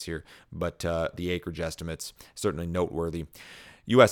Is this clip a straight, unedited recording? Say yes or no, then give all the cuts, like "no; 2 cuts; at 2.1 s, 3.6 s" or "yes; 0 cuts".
no; 1 cut; at 1.1 s